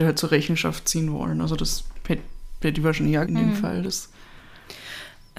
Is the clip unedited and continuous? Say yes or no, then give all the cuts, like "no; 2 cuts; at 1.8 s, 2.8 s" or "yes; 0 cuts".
no; 1 cut; at 3.3 s